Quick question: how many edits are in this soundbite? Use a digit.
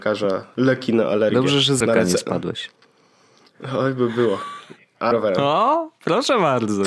2